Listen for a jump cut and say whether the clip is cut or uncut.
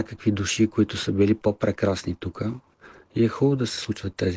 uncut